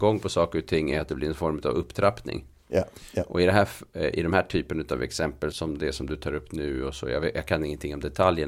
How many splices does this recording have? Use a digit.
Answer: 1